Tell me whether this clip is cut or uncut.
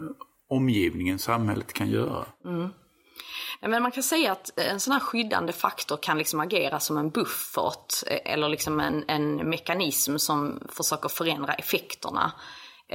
uncut